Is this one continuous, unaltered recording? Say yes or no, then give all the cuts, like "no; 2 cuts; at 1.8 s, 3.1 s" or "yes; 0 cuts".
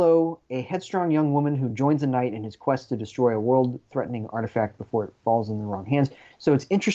yes; 0 cuts